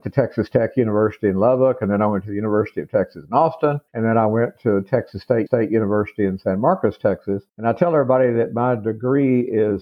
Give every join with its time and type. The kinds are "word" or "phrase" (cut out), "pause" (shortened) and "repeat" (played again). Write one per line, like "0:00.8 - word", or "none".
0:03.9 - pause
0:05.5 - repeat
0:07.5 - pause